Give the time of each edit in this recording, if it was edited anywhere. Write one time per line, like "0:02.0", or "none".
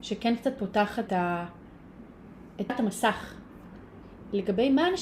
0:01.1
0:02.7